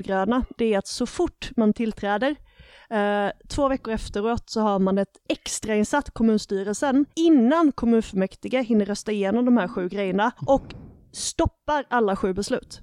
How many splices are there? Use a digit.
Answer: 2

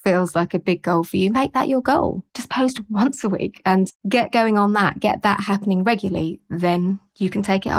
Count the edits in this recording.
1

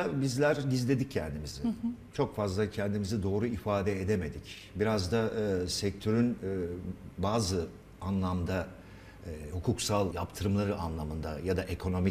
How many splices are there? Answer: 1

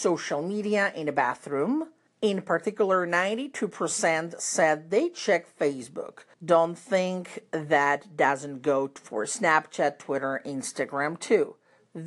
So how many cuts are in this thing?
2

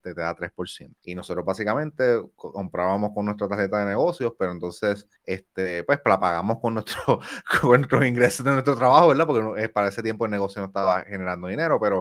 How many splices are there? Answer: 2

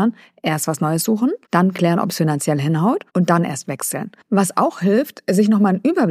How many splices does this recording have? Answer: 2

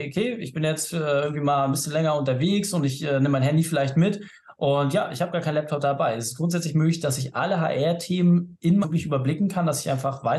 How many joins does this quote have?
1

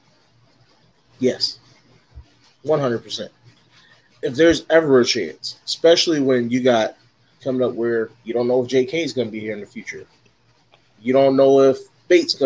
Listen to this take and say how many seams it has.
1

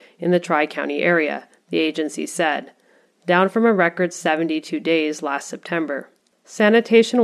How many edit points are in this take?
0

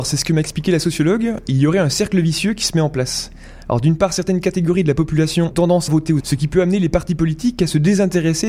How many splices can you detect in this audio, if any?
3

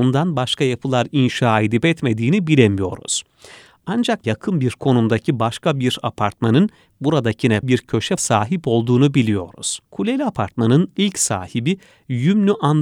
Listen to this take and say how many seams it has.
4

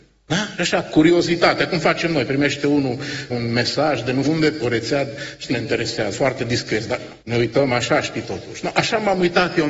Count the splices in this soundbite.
6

